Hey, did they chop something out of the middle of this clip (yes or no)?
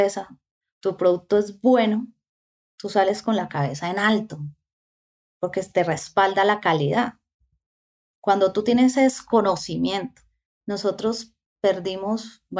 no